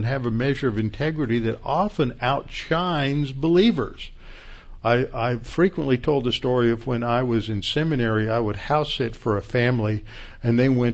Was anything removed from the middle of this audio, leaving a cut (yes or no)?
no